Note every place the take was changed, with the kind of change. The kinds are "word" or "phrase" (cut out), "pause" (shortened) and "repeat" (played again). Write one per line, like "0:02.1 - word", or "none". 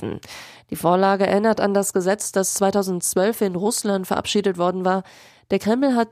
none